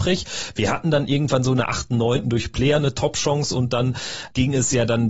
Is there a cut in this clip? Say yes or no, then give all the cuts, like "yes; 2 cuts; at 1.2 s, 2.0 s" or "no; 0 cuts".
no; 0 cuts